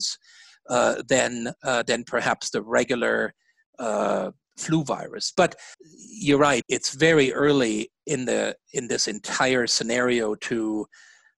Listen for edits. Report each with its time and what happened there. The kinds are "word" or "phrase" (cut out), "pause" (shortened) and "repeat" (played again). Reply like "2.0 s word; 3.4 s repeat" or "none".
5.7 s pause; 6.6 s word